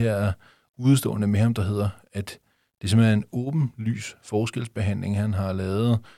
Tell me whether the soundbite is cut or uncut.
uncut